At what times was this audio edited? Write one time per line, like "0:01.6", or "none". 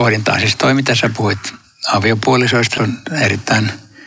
0:02.8